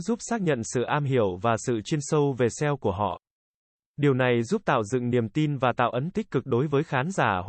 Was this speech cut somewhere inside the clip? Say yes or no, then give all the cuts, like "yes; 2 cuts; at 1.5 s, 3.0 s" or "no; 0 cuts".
yes; 1 cut; at 6.1 s